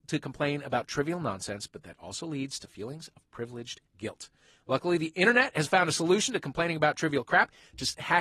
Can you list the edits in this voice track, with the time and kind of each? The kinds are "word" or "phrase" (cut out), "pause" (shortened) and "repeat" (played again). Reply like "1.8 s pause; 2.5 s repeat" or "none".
3.9 s pause